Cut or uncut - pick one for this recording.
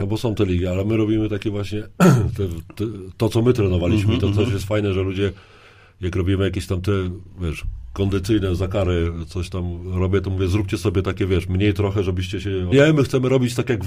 cut